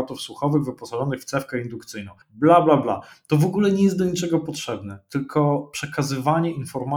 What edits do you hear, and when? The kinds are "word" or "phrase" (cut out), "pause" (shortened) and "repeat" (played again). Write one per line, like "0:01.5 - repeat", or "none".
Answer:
0:02.2 - pause